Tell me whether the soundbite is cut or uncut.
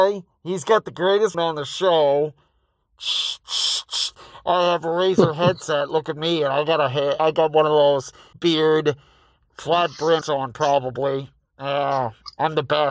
cut